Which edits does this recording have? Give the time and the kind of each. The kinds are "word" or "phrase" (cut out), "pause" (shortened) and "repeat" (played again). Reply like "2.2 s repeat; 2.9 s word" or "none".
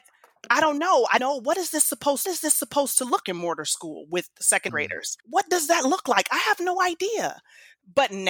1.2 s word; 2.2 s repeat; 3.2 s phrase; 4.7 s phrase; 5.2 s pause